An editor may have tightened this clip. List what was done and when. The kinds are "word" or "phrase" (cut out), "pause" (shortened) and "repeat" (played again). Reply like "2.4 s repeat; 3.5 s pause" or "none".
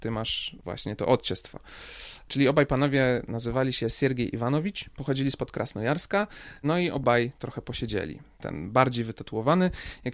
none